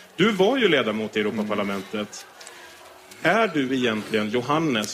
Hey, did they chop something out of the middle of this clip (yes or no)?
no